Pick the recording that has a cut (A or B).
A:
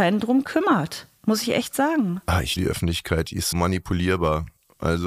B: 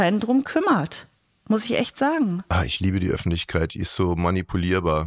A